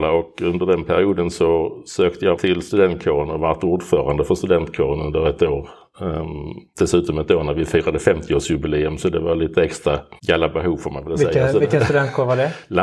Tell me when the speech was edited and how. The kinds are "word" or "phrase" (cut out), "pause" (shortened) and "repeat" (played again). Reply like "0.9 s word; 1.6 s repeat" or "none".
2.4 s word; 10.2 s pause